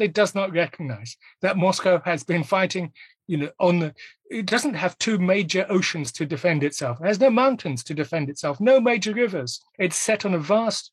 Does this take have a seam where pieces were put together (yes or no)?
yes